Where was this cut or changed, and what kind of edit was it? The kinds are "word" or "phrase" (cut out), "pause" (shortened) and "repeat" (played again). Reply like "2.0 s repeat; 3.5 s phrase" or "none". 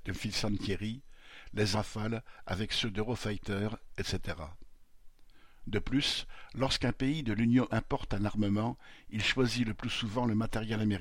1.7 s word; 7.7 s word